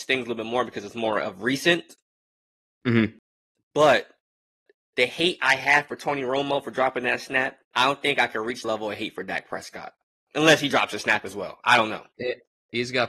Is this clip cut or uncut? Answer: cut